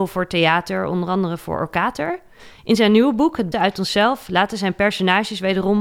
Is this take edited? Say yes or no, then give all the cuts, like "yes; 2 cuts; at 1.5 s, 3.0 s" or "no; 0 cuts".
yes; 1 cut; at 3.5 s